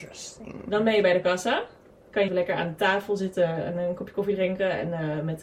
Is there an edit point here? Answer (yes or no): yes